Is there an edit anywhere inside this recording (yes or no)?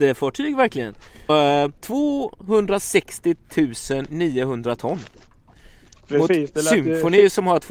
yes